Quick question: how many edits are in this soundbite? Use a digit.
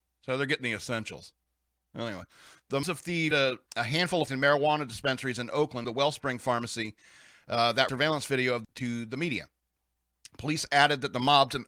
7